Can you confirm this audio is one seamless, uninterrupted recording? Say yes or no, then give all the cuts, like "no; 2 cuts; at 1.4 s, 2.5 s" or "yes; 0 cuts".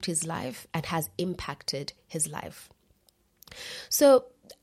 yes; 0 cuts